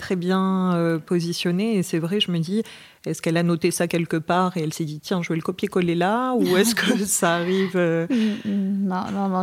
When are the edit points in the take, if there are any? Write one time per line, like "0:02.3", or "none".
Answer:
none